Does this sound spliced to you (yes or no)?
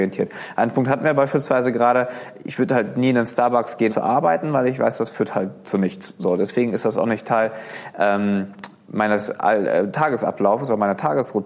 yes